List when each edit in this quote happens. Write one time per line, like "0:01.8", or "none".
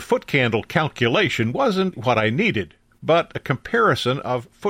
0:01.9